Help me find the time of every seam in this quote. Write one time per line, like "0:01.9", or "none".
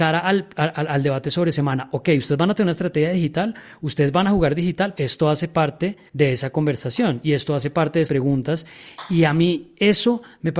0:04.9
0:06.1
0:08.1